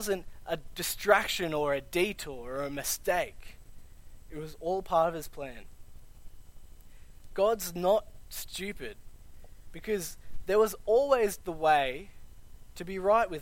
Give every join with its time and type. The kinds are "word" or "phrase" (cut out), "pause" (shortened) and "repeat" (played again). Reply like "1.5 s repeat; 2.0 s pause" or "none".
none